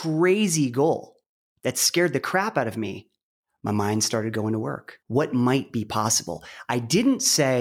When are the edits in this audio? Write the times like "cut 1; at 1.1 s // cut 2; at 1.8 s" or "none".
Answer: cut 1; at 5.0 s